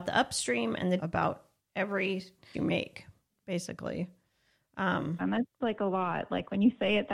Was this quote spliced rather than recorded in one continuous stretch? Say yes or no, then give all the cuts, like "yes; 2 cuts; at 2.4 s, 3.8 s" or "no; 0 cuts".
yes; 4 cuts; at 1.0 s, 2.5 s, 5.2 s, 5.6 s